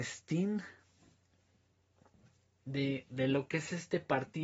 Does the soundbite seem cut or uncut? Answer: uncut